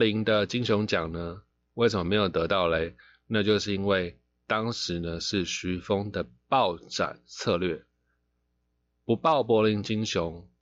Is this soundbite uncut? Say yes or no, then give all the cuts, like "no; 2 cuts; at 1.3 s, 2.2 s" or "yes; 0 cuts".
yes; 0 cuts